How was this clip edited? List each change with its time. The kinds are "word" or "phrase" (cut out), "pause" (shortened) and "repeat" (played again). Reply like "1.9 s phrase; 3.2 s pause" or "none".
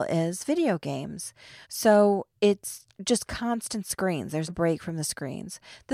1.6 s pause; 2.9 s pause; 4.5 s word

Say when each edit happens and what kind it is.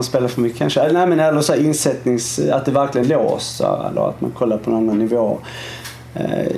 3.0 s word

